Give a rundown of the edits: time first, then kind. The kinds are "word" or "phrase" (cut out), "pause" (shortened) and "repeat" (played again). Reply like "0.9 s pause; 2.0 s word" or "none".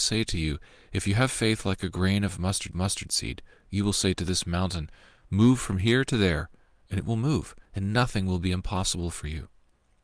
2.7 s repeat; 7.6 s pause